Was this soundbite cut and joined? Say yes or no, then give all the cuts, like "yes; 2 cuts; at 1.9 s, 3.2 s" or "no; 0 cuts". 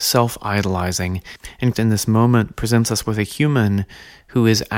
yes; 1 cut; at 1.7 s